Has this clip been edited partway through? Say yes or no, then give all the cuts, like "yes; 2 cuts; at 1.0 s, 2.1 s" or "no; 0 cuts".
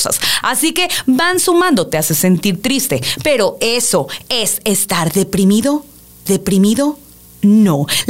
yes; 1 cut; at 6.3 s